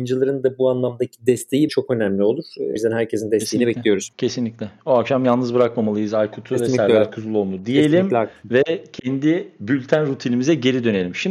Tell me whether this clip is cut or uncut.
cut